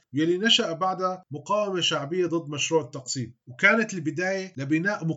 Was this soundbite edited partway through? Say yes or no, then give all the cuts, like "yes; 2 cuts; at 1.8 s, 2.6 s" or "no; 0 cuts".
no; 0 cuts